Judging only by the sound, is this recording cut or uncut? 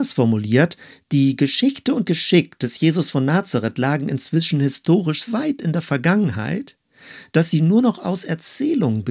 cut